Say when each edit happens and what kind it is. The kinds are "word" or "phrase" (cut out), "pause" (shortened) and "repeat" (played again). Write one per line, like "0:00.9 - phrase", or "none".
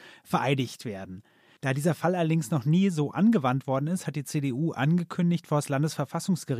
none